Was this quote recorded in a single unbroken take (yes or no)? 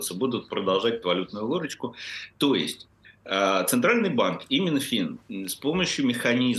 no